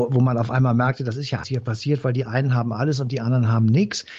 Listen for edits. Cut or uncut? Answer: cut